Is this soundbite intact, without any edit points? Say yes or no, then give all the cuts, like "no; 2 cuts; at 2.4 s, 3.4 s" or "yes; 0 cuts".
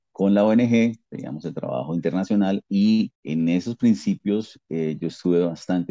no; 1 cut; at 3.2 s